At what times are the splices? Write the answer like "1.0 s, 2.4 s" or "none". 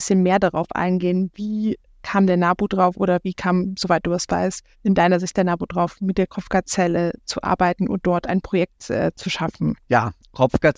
4.7 s, 9.8 s